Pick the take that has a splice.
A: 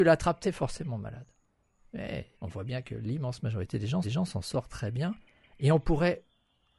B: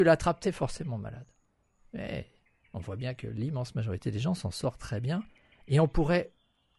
A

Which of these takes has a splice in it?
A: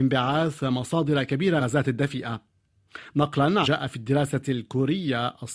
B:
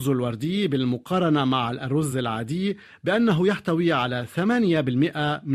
A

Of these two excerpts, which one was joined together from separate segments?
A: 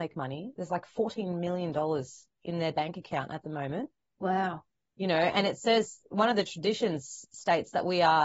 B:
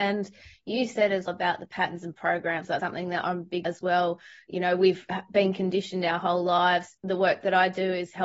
B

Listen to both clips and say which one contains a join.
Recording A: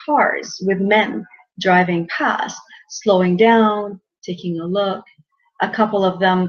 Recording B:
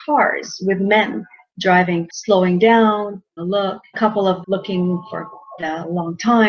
B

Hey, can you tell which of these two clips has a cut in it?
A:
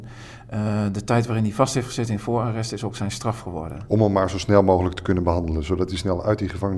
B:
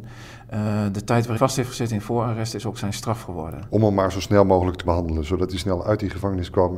B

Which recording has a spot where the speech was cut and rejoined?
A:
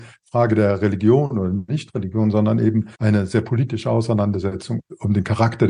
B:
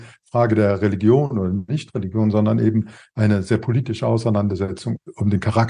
A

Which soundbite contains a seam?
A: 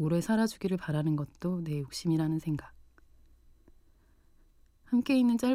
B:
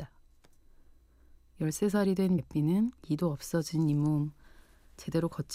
B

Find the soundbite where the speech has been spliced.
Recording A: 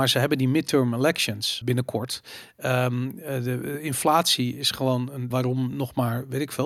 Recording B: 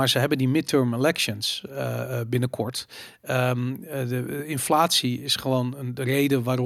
A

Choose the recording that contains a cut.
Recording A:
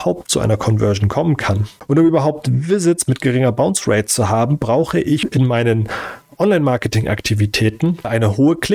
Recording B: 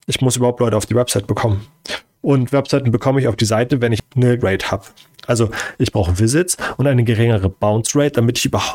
B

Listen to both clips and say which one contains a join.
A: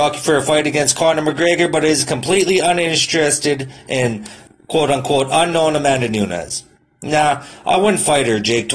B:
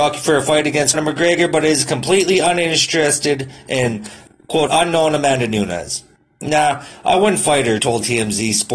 B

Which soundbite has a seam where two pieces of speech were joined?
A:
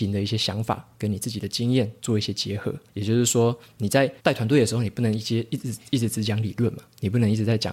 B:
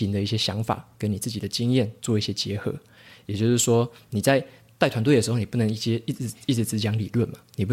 A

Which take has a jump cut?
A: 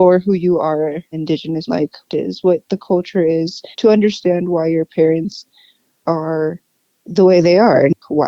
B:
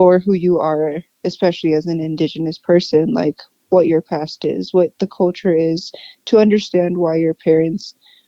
A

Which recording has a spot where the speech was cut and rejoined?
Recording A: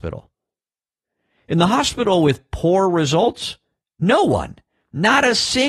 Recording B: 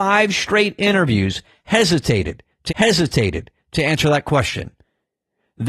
B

